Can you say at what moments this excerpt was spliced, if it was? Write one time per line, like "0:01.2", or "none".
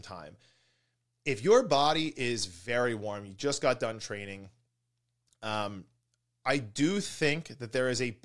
none